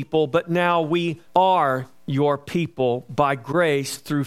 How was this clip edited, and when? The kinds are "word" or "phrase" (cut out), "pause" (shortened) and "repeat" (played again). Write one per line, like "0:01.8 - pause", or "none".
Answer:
0:01.3 - pause